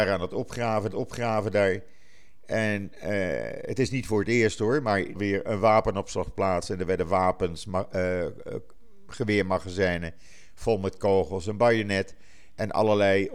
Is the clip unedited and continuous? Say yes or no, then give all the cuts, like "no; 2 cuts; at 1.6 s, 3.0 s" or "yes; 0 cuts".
no; 2 cuts; at 0.9 s, 5.1 s